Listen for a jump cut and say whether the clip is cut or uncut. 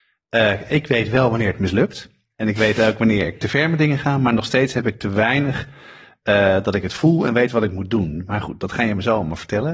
uncut